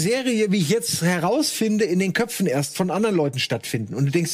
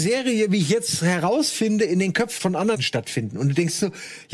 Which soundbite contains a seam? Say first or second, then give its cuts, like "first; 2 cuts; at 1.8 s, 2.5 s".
second; 2 cuts; at 2.4 s, 2.7 s